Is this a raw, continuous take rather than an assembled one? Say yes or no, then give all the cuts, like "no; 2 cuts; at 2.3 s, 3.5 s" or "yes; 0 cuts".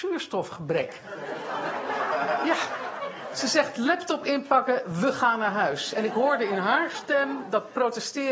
yes; 0 cuts